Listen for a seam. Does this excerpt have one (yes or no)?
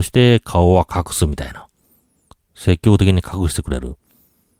no